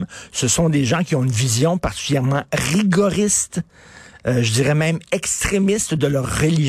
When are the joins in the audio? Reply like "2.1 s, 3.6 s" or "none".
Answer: none